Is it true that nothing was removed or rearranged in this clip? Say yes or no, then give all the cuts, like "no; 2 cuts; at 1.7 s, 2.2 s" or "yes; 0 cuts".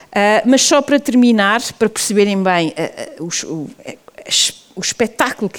yes; 0 cuts